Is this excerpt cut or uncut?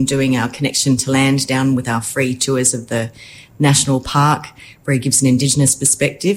uncut